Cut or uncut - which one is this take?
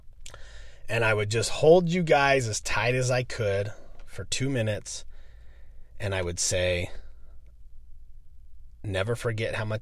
uncut